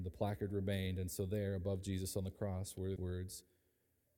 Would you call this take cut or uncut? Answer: cut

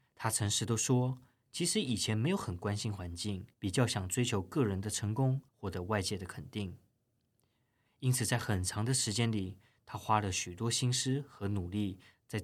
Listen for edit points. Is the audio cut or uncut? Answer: cut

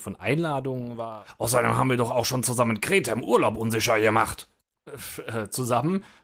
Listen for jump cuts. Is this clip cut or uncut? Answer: uncut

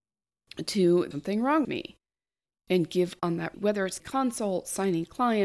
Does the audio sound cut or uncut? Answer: cut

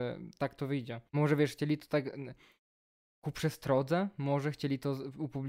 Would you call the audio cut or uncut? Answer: cut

